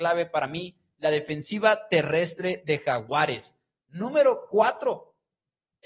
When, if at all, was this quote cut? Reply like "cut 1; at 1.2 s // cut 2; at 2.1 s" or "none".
none